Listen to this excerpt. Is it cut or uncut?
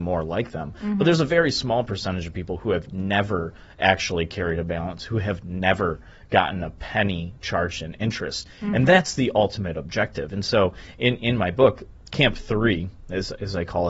uncut